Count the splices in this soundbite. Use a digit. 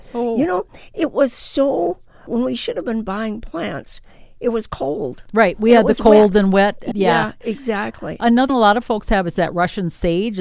2